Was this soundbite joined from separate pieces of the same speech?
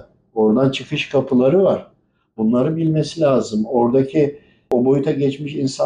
no; 0 cuts

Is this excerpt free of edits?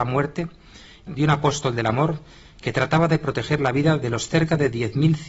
no; 1 cut; at 1.1 s

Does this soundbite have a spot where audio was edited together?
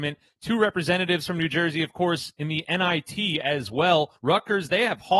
yes; 1 cut; at 4.2 s

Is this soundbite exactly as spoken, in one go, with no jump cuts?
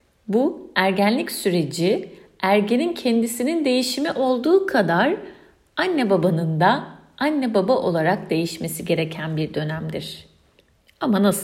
yes; 0 cuts

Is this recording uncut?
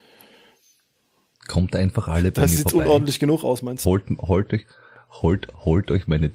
yes; 0 cuts

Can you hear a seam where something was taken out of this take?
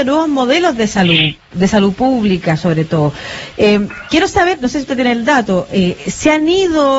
no; 0 cuts

